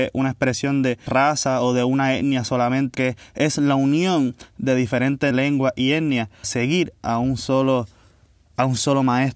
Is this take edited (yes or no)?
yes